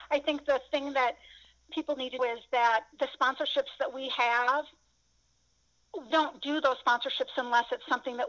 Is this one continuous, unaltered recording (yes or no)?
no